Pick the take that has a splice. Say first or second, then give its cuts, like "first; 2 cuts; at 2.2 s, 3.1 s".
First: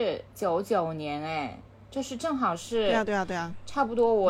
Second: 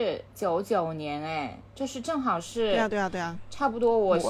second; 1 cut; at 1.7 s